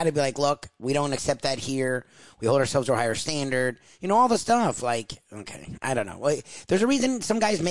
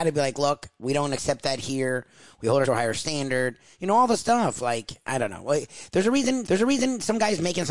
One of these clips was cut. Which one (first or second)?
second